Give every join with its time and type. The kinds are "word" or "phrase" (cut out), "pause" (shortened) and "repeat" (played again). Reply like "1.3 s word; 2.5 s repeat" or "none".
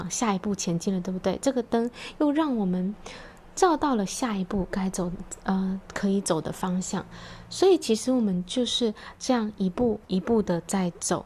10.0 s pause